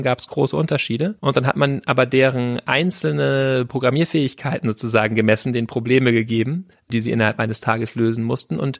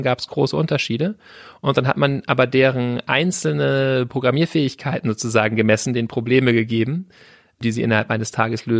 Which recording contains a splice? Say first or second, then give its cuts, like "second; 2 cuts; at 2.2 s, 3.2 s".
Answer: first; 2 cuts; at 1.2 s, 6.7 s